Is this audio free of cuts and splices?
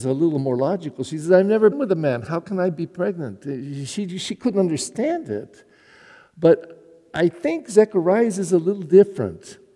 no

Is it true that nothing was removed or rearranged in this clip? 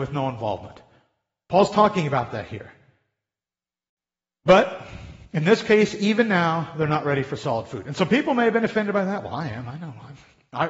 yes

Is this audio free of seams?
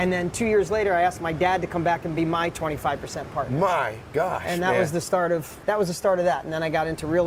yes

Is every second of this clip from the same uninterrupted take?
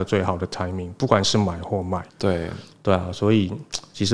no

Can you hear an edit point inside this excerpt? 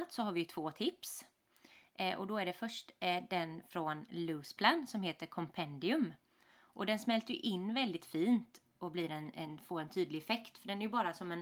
no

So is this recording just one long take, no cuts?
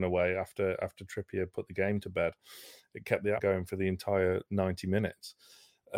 no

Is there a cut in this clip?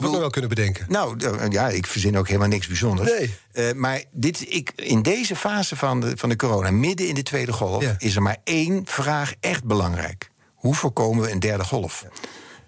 no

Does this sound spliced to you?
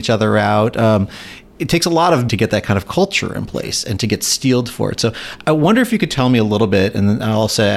yes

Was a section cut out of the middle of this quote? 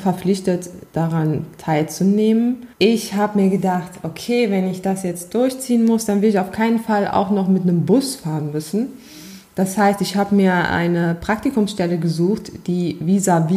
yes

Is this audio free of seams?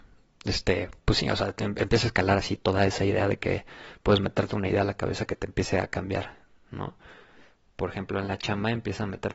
yes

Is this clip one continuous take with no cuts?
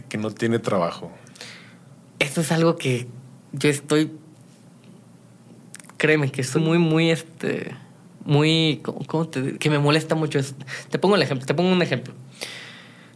no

